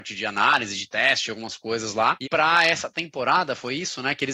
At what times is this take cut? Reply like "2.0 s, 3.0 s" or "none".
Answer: 2.2 s